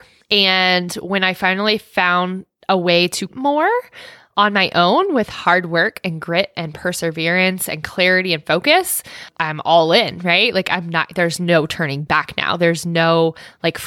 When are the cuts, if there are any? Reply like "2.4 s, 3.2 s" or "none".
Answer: 3.3 s, 9.3 s